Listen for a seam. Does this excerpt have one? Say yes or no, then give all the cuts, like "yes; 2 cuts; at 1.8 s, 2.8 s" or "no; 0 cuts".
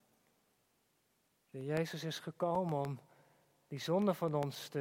no; 0 cuts